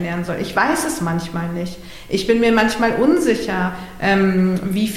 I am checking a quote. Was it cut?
no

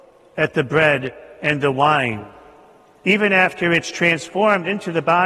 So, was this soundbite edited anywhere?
no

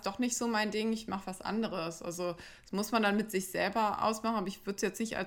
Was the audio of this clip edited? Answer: no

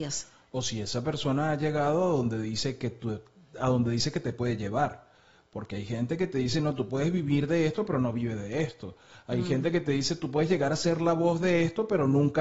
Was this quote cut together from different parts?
no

